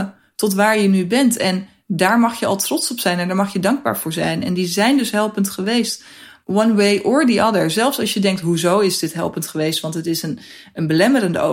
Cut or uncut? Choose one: uncut